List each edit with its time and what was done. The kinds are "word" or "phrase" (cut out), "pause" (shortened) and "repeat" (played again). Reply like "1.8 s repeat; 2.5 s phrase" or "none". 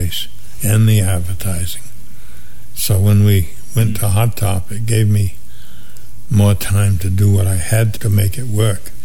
8.0 s word